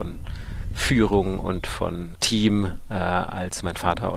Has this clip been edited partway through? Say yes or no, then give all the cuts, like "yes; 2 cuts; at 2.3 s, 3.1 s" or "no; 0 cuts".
yes; 1 cut; at 2.1 s